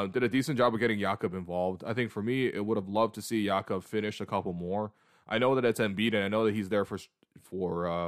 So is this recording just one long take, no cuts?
yes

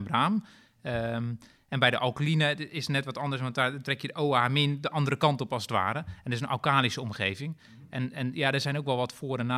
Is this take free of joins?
yes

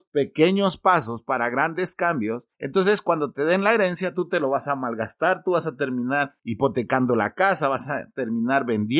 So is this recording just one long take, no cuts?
yes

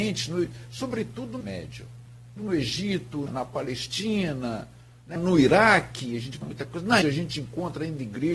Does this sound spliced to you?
yes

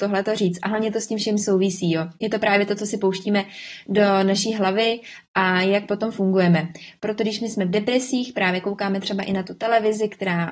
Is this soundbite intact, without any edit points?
no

